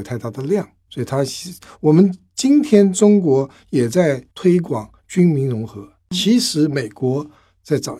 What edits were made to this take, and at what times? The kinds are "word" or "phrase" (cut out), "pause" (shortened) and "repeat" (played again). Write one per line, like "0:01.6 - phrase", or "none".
0:04.3 - pause